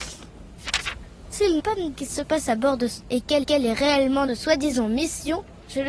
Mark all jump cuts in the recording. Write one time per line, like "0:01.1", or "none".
0:01.6
0:01.9
0:03.0
0:03.4
0:04.3